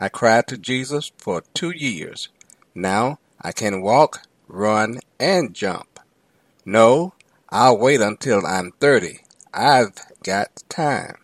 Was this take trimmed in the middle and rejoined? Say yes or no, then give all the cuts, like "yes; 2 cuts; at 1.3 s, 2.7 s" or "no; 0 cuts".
no; 0 cuts